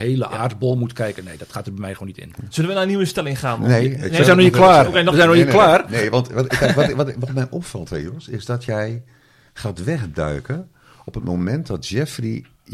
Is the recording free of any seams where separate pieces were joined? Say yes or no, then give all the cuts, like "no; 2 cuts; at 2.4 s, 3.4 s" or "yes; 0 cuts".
yes; 0 cuts